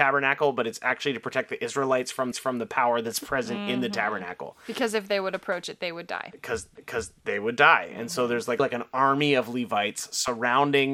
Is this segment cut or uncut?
cut